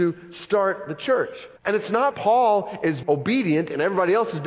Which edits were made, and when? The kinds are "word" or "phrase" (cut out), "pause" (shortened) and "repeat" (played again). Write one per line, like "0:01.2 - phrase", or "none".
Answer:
0:01.6 - pause
0:02.1 - word
0:03.0 - word